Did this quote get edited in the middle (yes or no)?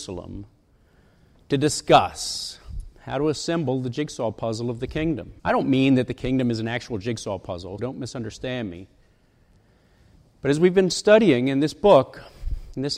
yes